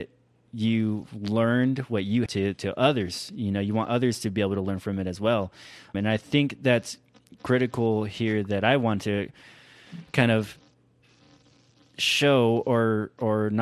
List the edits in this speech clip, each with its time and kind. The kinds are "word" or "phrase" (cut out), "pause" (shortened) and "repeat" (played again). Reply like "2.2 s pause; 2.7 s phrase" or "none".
2.3 s word; 5.9 s word